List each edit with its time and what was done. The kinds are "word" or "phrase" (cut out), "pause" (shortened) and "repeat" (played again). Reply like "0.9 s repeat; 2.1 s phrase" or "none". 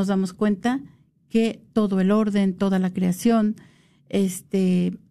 none